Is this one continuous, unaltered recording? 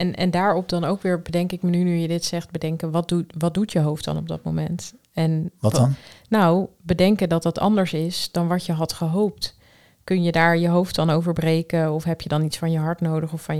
yes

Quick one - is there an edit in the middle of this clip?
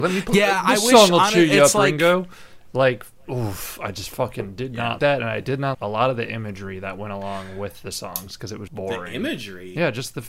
yes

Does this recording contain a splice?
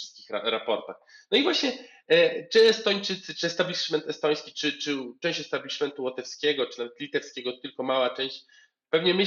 no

